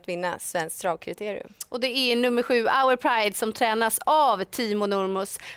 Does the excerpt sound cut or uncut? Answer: uncut